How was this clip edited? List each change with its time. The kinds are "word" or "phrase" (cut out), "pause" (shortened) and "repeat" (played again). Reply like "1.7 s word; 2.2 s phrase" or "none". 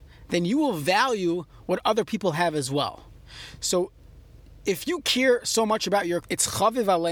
6.2 s word